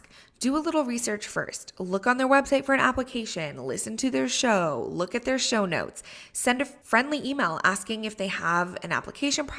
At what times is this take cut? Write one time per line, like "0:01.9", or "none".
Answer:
0:06.8